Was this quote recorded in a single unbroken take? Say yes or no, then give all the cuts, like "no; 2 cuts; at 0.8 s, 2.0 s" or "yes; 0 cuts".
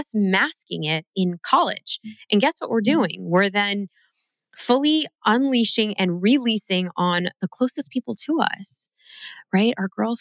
yes; 0 cuts